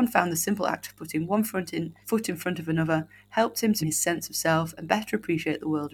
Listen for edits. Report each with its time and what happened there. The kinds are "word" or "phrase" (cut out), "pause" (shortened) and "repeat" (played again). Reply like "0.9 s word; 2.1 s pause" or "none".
2.0 s pause; 3.8 s word

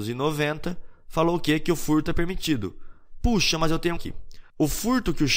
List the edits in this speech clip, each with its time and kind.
4.0 s phrase

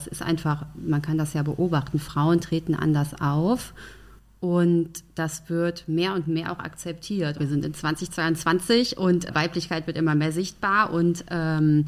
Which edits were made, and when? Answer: none

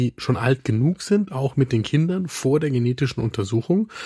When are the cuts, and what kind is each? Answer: none

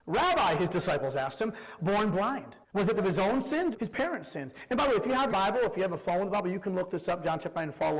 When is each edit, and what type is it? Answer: 1.8 s phrase; 2.6 s pause; 3.0 s word; 3.7 s word; 5.3 s word

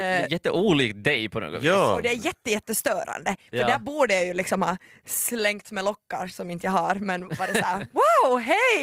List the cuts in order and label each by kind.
none

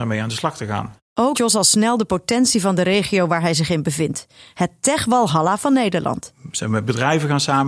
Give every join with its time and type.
1.3 s word

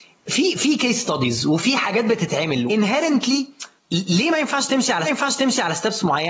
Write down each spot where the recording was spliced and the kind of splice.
2.7 s word; 3.8 s word; 5.0 s repeat

